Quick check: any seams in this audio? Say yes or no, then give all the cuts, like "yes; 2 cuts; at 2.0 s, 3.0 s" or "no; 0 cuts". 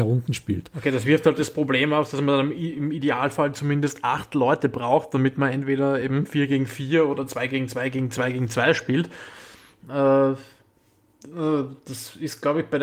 no; 0 cuts